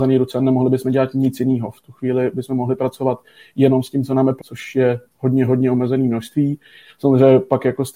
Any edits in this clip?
yes; 1 cut; at 4.4 s

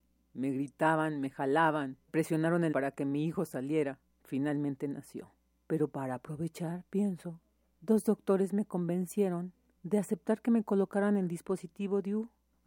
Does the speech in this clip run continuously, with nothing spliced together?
no; 2 cuts; at 2.1 s, 2.7 s

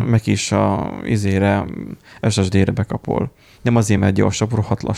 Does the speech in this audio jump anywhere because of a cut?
no; 0 cuts

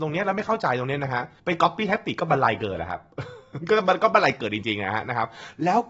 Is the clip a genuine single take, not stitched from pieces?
no; 1 cut; at 1.4 s

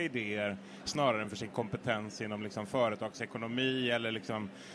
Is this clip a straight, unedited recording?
yes; 0 cuts

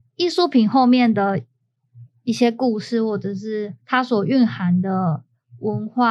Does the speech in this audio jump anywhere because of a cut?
yes; 1 cut; at 3.8 s

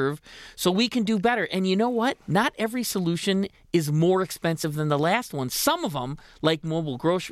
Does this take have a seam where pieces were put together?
yes; 1 cut; at 2.2 s

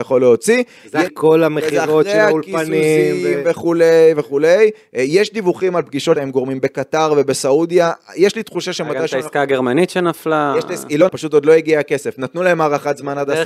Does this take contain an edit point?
yes; 3 cuts; at 1.1 s, 6.2 s, 11.1 s

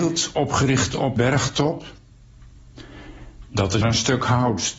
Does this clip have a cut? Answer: yes; 2 cuts; at 1.2 s, 3.8 s

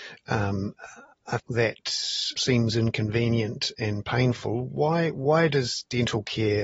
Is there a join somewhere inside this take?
yes; 2 cuts; at 1.4 s, 2.4 s

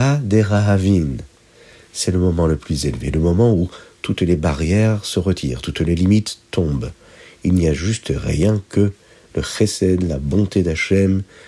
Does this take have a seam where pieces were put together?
no; 0 cuts

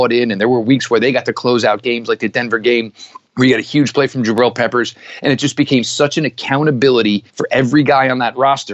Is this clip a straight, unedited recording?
no; 2 cuts; at 3.3 s, 7.3 s

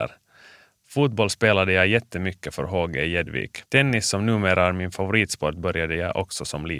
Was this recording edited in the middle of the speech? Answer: yes; 1 cut; at 3.7 s

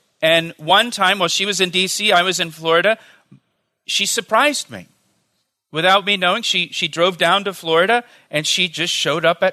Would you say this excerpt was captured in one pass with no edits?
yes; 0 cuts

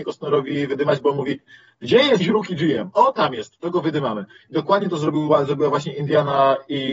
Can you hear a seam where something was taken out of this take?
yes; 1 cut; at 2.2 s

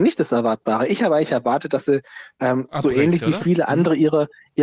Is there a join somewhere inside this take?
no; 0 cuts

